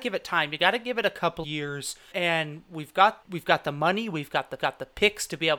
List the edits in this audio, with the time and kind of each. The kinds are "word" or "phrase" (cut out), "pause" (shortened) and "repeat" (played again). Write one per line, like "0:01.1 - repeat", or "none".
0:01.4 - word
0:02.1 - word
0:03.2 - word
0:04.6 - repeat